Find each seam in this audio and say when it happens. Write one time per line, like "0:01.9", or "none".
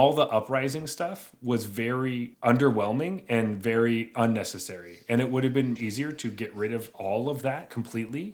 0:02.3
0:05.8